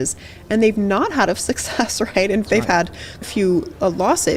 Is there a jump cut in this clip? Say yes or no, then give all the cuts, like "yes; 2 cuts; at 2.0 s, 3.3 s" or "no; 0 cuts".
yes; 3 cuts; at 1.3 s, 2.5 s, 3.2 s